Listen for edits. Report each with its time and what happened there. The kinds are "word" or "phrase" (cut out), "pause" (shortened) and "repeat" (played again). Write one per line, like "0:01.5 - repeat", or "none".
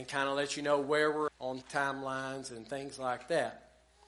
0:01.3 - word
0:01.6 - word